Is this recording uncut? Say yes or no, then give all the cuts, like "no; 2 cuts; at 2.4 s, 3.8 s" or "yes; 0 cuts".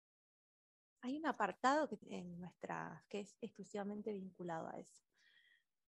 no; 2 cuts; at 2.0 s, 3.1 s